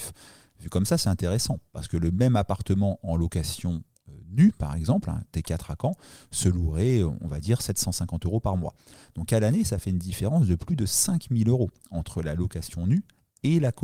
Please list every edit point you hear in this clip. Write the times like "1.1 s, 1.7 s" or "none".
none